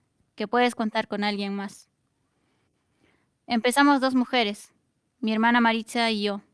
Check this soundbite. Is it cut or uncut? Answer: uncut